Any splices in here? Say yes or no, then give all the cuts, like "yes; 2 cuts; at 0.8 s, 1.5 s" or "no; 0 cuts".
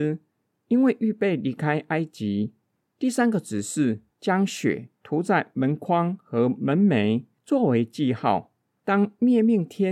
yes; 2 cuts; at 4.1 s, 5.0 s